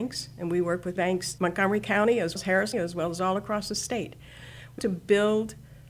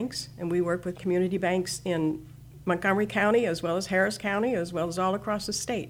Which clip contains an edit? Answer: first; 5 cuts; at 1.0 s, 1.4 s, 2.4 s, 2.7 s, 4.8 s

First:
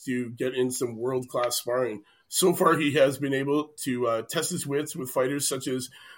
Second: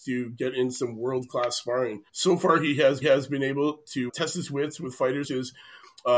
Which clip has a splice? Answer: second; 4 cuts; at 2.1 s, 3.0 s, 4.1 s, 5.2 s

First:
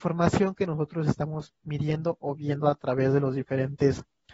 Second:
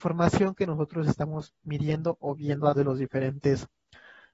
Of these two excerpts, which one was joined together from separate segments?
second; 1 cut; at 2.7 s

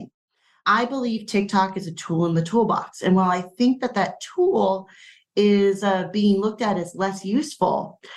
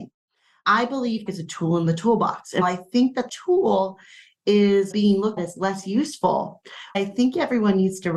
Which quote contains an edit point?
second; 6 cuts; at 1.3 s, 2.6 s, 3.3 s, 4.9 s, 5.4 s, 6.9 s

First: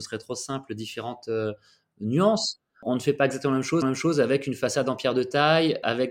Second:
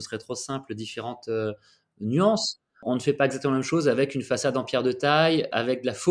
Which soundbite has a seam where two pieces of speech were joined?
first; 1 cut; at 3.8 s

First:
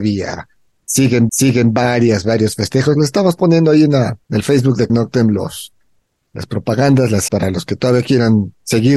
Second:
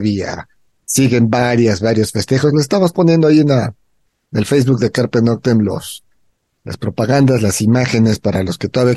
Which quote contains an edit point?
first; 4 cuts; at 1.3 s, 4.2 s, 4.9 s, 7.3 s

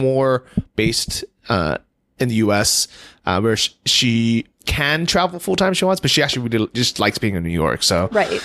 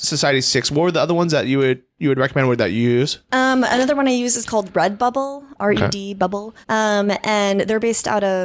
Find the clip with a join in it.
second; 1 cut; at 6.6 s

